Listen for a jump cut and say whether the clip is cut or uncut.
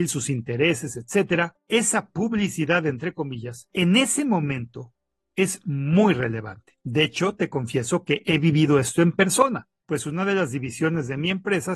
uncut